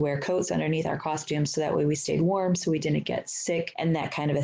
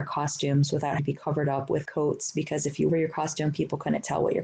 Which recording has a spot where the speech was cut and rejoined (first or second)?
second